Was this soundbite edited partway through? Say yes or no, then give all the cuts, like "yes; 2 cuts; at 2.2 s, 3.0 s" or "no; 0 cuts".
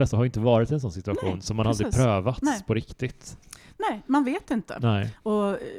no; 0 cuts